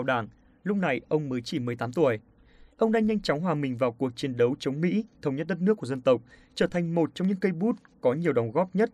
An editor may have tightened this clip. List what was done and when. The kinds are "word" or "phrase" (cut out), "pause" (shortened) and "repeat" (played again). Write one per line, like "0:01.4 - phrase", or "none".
none